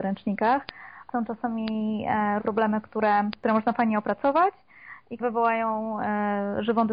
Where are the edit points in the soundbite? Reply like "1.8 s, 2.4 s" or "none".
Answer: 2.4 s, 5.2 s